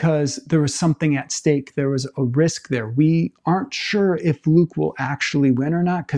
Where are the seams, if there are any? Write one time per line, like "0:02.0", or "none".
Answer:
none

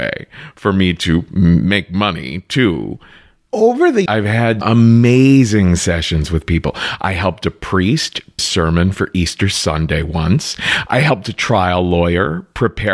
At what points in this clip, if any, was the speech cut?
0:04.1
0:04.6
0:08.4

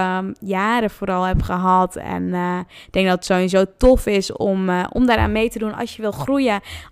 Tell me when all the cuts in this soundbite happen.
none

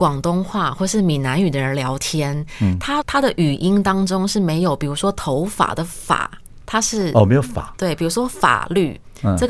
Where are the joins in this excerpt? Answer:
0:03.0
0:06.6

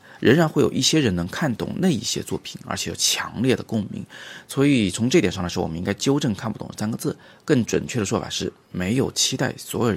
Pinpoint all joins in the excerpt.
none

